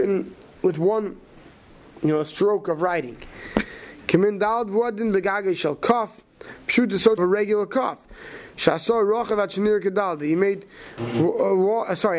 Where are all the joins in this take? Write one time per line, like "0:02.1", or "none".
0:07.2